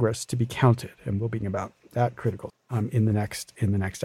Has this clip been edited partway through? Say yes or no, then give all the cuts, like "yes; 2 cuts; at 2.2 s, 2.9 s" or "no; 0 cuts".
yes; 2 cuts; at 1.4 s, 2.5 s